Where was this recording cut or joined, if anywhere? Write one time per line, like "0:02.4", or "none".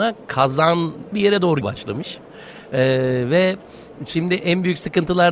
0:01.1
0:01.6